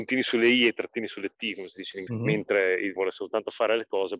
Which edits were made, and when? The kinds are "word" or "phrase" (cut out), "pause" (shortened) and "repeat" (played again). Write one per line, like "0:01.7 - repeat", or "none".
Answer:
0:02.1 - word
0:03.0 - word